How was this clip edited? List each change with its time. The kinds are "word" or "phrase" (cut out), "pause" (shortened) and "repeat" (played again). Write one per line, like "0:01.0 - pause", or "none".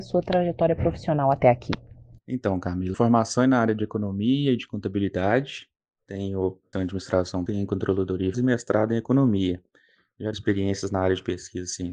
0:02.9 - word
0:06.7 - word
0:07.5 - word
0:08.3 - word
0:10.3 - word